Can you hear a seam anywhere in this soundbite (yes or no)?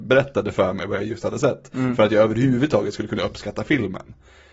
no